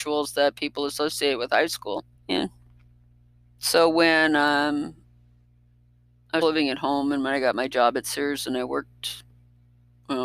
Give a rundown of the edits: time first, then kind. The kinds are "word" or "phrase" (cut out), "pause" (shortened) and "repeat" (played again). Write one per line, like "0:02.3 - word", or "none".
0:02.1 - pause
0:06.4 - word